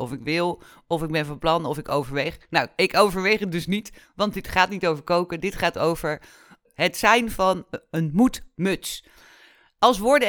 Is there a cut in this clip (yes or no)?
no